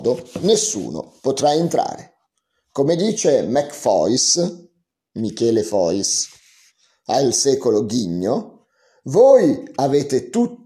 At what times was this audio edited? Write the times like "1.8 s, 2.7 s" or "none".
none